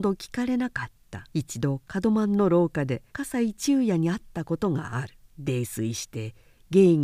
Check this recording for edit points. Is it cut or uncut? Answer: cut